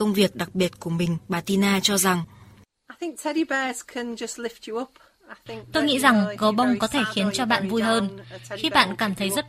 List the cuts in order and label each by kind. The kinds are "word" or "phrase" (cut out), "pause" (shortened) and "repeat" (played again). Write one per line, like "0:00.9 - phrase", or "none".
none